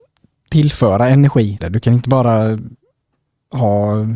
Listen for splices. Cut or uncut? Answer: cut